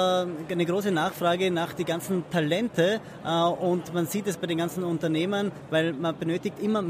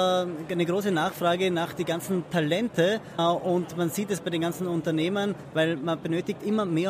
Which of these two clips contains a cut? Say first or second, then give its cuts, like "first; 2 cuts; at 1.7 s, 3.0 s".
second; 1 cut; at 3.2 s